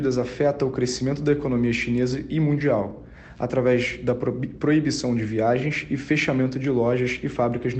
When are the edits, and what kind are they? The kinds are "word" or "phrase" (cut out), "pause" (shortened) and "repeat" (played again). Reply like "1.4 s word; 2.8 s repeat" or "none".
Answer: none